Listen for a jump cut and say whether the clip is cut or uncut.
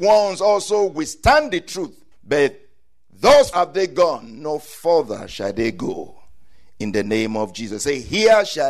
cut